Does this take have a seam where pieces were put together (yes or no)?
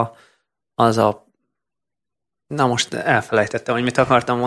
no